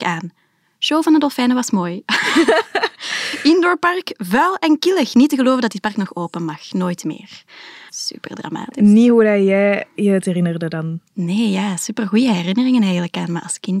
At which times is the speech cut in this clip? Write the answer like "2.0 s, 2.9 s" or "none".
7.9 s